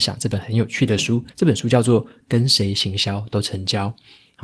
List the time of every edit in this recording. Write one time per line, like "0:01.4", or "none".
0:01.3